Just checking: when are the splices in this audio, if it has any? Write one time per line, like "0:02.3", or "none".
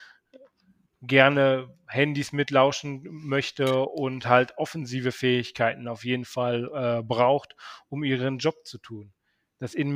none

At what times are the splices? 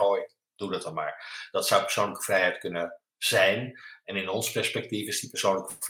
none

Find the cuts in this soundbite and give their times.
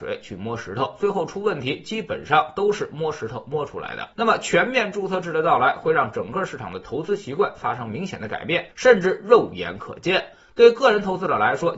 0:04.1
0:08.7

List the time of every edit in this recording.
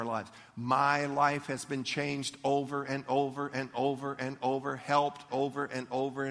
0:05.3

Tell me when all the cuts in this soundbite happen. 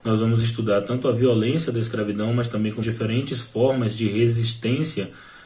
0:02.8

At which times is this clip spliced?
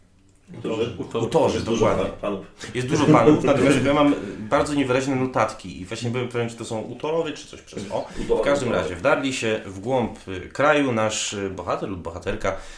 none

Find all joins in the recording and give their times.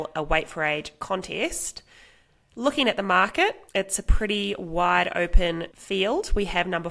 0:03.7

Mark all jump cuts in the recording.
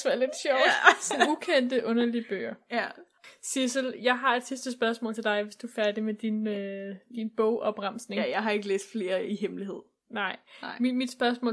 none

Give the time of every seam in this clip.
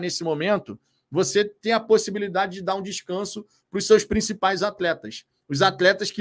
none

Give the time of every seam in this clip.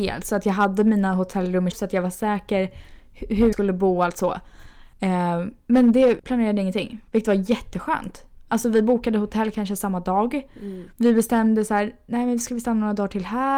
0:01.7
0:03.5
0:04.9
0:06.2
0:07.1
0:10.9

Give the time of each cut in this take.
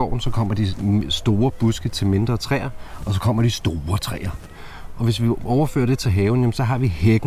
none

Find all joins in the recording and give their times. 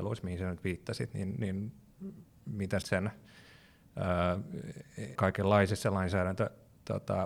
0:02.8
0:05.1

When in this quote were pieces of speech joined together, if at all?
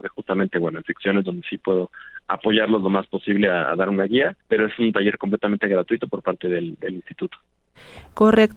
0:04.4

